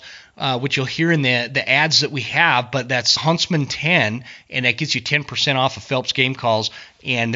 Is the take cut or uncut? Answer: cut